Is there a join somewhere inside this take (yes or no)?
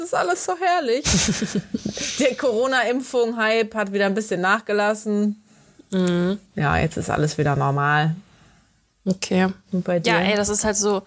no